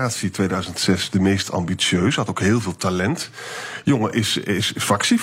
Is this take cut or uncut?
uncut